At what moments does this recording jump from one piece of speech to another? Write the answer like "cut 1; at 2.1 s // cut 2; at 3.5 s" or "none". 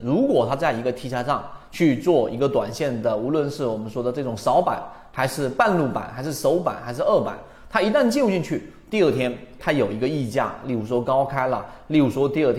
cut 1; at 9.6 s